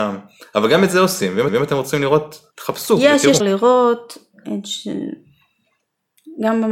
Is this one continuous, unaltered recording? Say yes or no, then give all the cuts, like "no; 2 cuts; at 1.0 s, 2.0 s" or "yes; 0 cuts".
no; 3 cuts; at 1.5 s, 2.5 s, 3.4 s